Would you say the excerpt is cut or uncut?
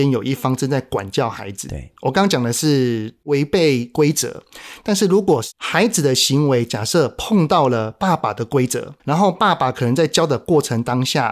cut